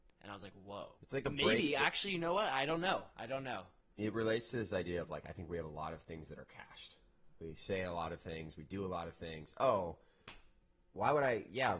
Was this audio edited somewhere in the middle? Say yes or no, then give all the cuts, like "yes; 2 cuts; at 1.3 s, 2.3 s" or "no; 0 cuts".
yes; 3 cuts; at 1.0 s, 3.1 s, 3.8 s